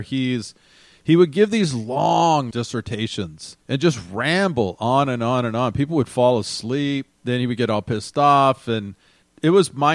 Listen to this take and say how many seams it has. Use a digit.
3